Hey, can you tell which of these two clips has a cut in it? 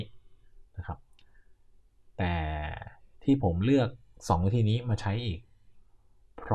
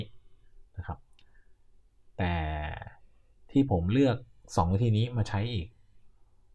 first; 1 cut; at 3.1 s

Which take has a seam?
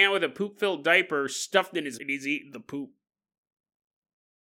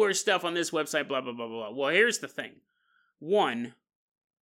first; 1 cut; at 2.0 s

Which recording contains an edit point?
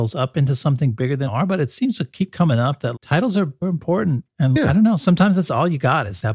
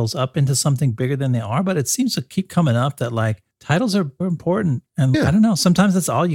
first; 2 cuts; at 1.3 s, 2.9 s

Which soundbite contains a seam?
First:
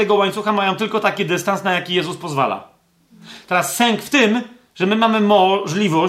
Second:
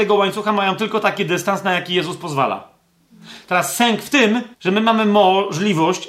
second; 1 cut; at 4.5 s

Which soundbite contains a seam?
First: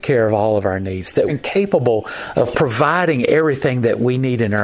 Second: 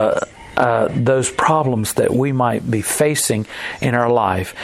first; 2 cuts; at 1.3 s, 2.3 s

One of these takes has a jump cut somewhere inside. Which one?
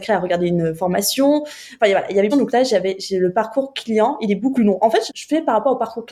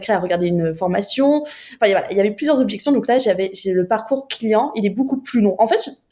first; 3 cuts; at 2.3 s, 4.6 s, 5.1 s

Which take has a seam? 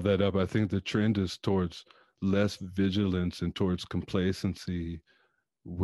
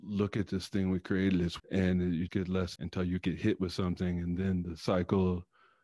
second; 3 cuts; at 1.6 s, 2.3 s, 2.8 s

